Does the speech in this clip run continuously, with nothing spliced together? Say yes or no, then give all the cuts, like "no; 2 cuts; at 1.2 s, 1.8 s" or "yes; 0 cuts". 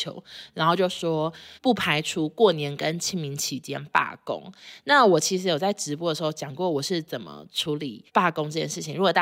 no; 2 cuts; at 1.6 s, 8.1 s